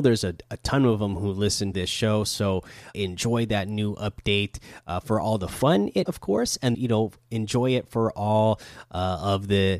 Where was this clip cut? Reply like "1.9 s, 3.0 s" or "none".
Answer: 1.7 s, 2.9 s, 6.1 s, 6.7 s